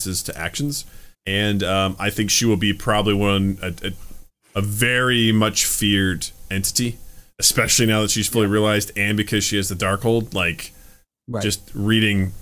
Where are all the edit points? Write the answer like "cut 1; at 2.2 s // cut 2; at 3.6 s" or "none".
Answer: cut 1; at 1.1 s